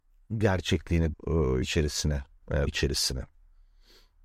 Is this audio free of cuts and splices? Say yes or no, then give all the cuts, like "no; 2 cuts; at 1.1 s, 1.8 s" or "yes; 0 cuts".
no; 3 cuts; at 1.1 s, 1.6 s, 2.7 s